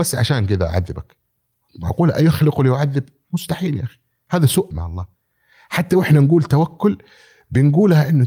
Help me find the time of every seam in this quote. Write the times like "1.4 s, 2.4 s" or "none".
4.7 s